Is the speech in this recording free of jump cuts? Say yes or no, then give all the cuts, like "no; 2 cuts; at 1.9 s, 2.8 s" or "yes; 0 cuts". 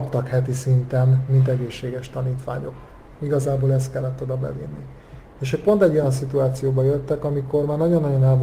yes; 0 cuts